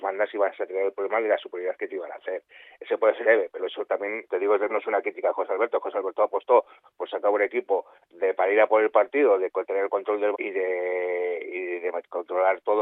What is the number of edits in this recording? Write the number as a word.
six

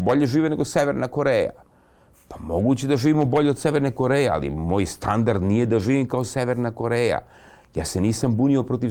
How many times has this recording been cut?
zero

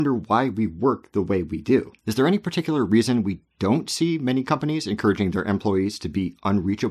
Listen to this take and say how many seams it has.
one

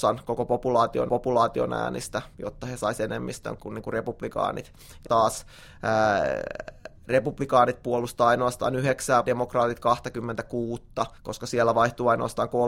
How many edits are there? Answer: five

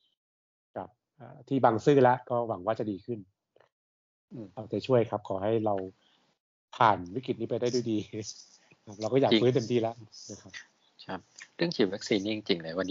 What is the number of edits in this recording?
zero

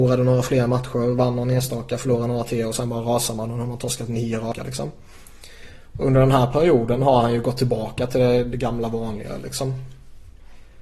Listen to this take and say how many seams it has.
zero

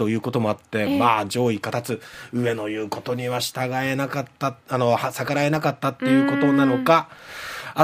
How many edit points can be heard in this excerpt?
one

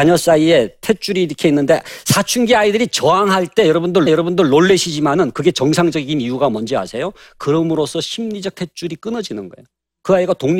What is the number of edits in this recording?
one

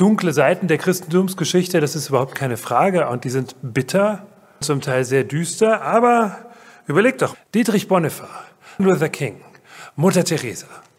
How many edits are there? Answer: three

